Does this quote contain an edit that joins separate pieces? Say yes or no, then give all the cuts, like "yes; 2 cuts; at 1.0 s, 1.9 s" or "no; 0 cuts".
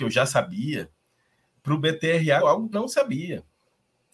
yes; 2 cuts; at 2.4 s, 2.7 s